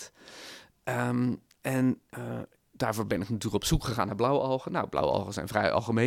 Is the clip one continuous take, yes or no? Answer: no